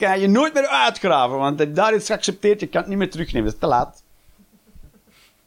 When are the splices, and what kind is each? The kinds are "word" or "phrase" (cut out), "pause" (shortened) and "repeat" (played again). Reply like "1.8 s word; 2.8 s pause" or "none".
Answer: none